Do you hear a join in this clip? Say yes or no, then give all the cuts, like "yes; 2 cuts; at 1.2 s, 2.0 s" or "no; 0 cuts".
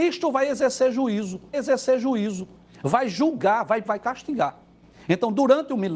yes; 2 cuts; at 1.5 s, 3.9 s